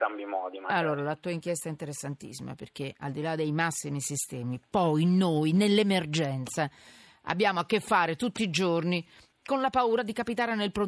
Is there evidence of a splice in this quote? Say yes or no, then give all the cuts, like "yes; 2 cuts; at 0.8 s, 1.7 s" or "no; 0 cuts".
no; 0 cuts